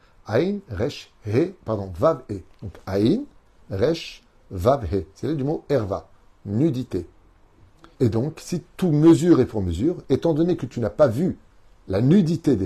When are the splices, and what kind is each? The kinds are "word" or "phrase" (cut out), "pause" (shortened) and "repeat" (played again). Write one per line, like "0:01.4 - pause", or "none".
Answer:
0:01.6 - pause
0:02.5 - pause
0:07.9 - pause